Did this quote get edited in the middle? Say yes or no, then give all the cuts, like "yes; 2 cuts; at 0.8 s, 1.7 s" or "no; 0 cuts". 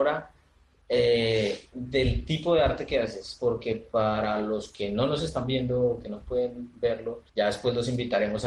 yes; 1 cut; at 7.3 s